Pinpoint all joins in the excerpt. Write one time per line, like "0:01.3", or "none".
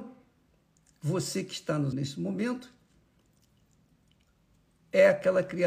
0:01.9

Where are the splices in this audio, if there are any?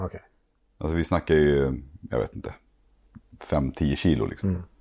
none

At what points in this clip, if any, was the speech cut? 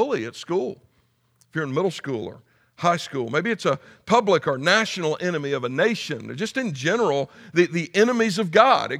none

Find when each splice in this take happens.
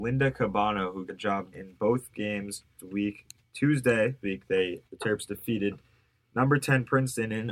0:01.1
0:01.5
0:02.8
0:04.2
0:04.9

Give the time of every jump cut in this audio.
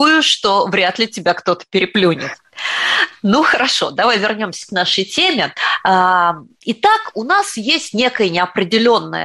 none

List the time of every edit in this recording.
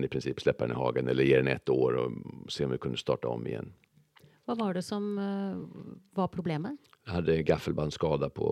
none

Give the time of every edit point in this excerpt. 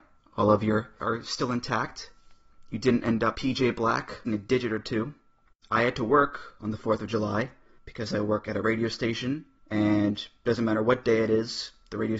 0:01.0
0:03.3
0:04.3

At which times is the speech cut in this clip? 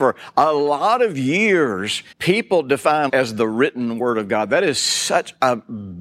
0:02.1
0:03.1

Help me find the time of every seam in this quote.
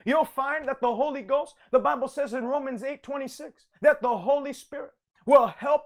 0:03.7

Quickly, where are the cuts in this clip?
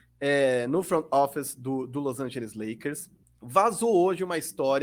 0:03.2

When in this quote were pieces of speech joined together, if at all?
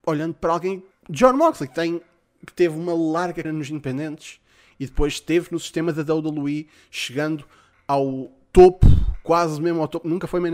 0:00.9
0:03.4

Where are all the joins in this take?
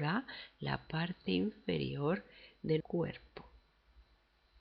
0:02.8

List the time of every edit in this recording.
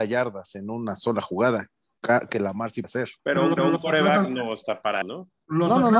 0:02.3
0:02.8
0:03.2
0:03.6
0:05.0

